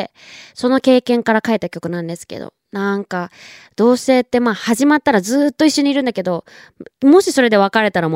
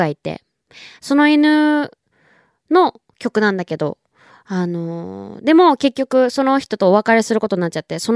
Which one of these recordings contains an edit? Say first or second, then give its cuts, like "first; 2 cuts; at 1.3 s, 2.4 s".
first; 1 cut; at 6.9 s